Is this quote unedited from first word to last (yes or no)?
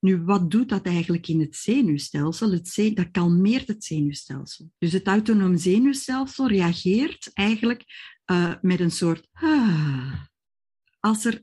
no